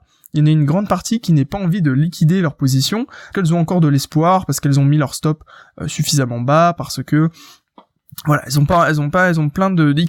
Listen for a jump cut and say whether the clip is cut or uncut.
cut